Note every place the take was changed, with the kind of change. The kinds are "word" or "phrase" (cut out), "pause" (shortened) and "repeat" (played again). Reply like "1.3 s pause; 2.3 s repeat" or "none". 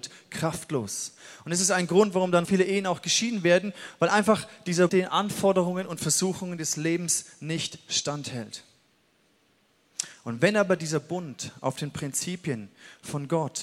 2.4 s word; 4.9 s word